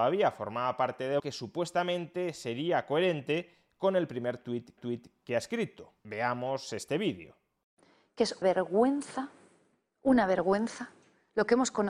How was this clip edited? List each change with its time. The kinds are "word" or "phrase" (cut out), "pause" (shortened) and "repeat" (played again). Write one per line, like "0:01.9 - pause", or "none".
0:01.2 - phrase
0:04.8 - repeat
0:06.0 - pause
0:08.4 - word